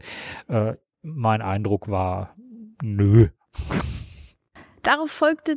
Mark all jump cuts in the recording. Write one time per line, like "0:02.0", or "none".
0:02.7